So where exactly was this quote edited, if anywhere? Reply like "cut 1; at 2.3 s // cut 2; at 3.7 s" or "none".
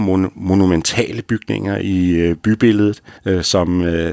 cut 1; at 3.2 s